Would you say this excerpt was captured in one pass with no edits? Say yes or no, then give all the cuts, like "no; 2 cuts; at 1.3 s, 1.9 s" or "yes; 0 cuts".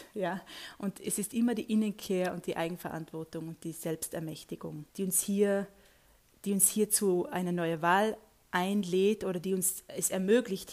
no; 1 cut; at 4.9 s